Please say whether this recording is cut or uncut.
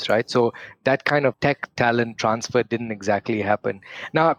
cut